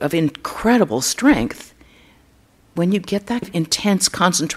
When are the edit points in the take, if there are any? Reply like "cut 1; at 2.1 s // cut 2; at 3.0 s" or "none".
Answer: cut 1; at 3.4 s